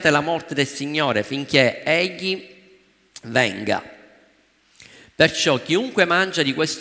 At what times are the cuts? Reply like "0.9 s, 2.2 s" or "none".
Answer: none

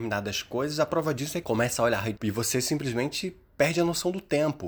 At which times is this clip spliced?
1.4 s, 2.2 s

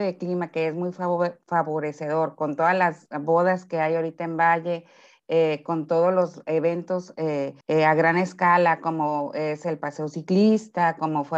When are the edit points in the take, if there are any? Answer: 7.6 s

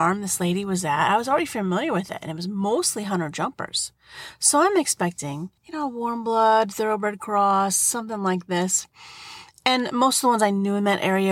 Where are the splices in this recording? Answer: 5.6 s

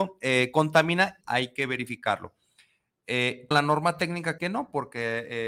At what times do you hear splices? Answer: 1.2 s, 3.5 s, 4.4 s

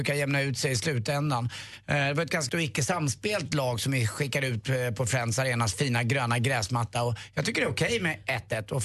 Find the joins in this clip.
2.5 s

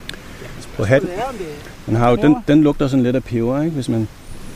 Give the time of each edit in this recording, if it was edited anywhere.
2.2 s

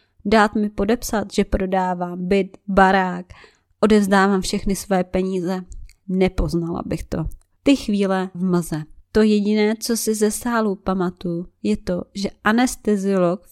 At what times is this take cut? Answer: 8.3 s

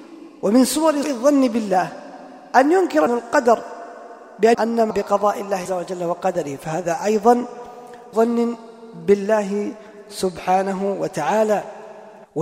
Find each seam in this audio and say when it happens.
1.0 s, 3.1 s, 4.5 s, 4.9 s, 5.7 s, 8.1 s

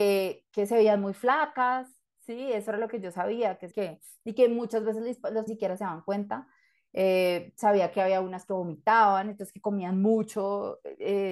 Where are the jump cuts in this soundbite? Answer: 3.7 s, 5.5 s

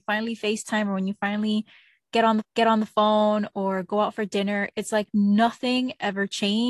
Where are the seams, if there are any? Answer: 2.4 s

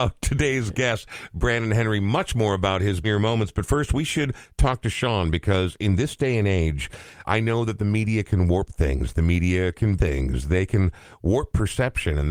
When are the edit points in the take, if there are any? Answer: 3.0 s, 7.2 s, 10.0 s

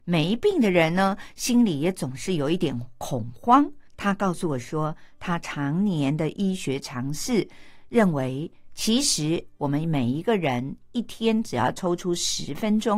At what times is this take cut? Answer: 3.9 s

